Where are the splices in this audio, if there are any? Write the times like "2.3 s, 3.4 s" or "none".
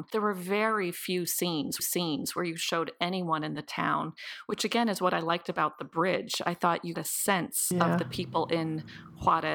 1.8 s, 6.9 s